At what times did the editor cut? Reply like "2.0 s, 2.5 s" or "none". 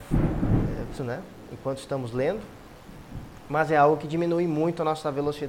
0.9 s